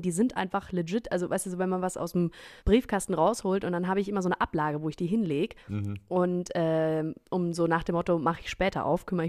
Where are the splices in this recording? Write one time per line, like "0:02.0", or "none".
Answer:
0:02.6
0:05.6